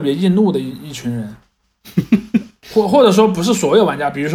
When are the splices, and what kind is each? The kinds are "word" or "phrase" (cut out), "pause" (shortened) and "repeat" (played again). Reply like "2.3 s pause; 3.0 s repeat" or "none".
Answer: none